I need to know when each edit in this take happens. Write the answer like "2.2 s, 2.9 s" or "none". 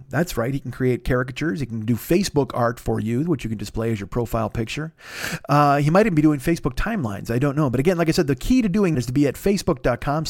8.9 s